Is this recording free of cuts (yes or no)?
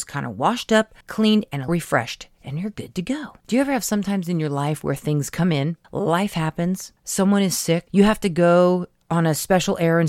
no